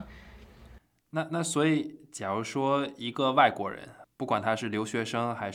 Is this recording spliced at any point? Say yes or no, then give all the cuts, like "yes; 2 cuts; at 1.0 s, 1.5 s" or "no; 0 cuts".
yes; 1 cut; at 4.0 s